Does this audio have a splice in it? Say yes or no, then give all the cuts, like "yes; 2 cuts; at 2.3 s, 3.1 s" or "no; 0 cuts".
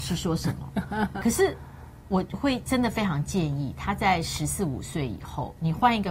yes; 1 cut; at 1.2 s